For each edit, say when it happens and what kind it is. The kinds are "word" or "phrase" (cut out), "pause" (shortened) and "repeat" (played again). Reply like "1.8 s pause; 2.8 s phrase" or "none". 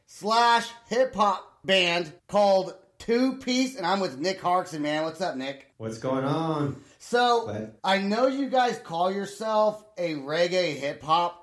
2.2 s pause; 5.7 s pause; 7.8 s pause